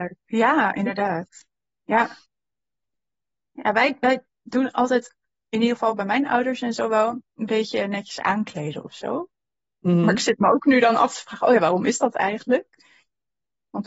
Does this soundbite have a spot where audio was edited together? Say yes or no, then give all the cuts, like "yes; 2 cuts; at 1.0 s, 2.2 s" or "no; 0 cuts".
no; 0 cuts